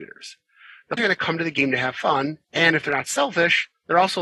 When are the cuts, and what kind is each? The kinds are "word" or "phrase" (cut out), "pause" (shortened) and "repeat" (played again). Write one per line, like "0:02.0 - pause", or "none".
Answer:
0:01.0 - word
0:02.4 - pause

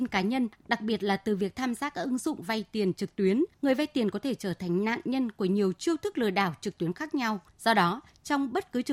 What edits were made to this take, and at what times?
0:03.5 - pause
0:07.5 - pause

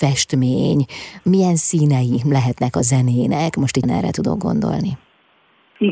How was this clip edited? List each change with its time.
0:01.2 - word
0:03.8 - word

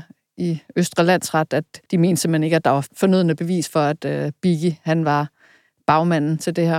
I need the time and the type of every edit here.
0:01.9 - pause

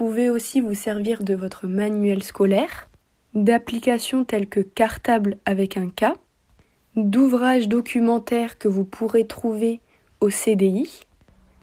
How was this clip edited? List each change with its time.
none

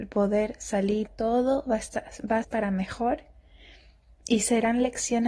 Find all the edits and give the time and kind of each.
0:01.1 - phrase
0:02.4 - word

